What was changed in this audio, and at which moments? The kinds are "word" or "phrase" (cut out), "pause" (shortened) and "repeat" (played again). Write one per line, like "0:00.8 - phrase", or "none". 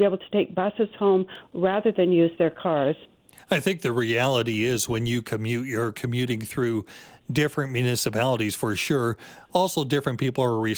none